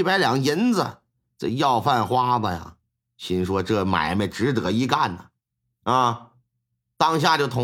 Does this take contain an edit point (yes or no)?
no